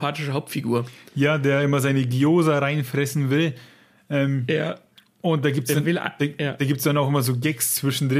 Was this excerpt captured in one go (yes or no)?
yes